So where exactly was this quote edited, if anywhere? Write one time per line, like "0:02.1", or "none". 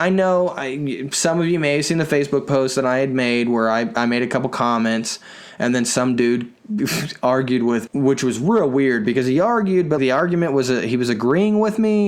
0:07.9
0:10.0